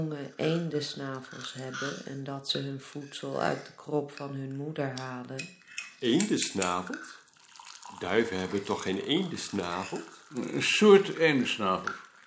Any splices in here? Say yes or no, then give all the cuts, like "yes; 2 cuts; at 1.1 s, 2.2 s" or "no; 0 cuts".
no; 0 cuts